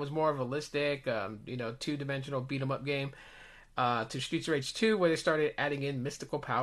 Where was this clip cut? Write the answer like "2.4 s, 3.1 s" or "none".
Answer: none